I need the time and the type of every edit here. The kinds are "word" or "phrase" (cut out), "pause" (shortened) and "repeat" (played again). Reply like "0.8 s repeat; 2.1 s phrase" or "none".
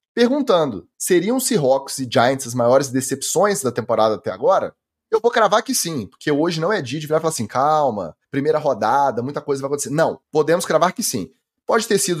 0.9 s pause; 4.9 s pause; 8.2 s pause; 10.2 s pause